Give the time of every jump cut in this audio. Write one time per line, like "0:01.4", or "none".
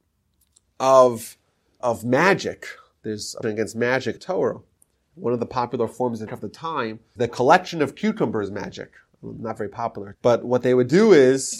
0:01.8
0:03.4
0:04.2
0:06.3
0:07.2
0:10.1